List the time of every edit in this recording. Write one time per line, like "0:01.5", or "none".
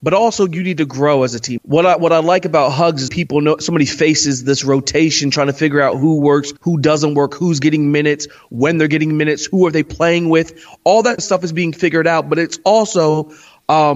0:01.6
0:03.1
0:06.6
0:11.2